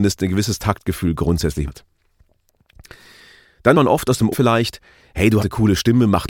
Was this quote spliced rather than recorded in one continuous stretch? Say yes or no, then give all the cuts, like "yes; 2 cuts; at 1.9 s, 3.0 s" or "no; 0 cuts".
yes; 4 cuts; at 1.7 s, 3.7 s, 4.3 s, 5.4 s